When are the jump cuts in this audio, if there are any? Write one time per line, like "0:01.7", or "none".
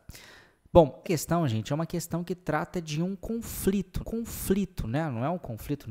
0:01.0
0:04.0